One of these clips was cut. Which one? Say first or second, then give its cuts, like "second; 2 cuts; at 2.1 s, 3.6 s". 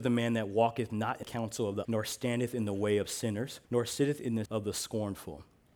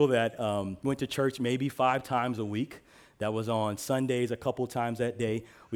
first; 4 cuts; at 1.2 s, 1.8 s, 3.6 s, 4.4 s